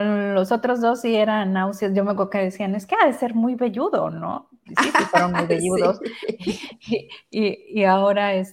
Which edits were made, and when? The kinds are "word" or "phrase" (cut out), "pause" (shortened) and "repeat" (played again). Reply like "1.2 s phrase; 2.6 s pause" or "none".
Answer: none